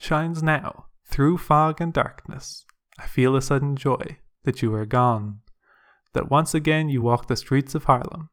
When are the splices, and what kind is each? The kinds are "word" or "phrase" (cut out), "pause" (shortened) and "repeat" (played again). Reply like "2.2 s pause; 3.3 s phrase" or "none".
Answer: none